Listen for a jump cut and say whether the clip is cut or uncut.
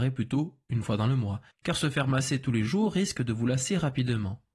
cut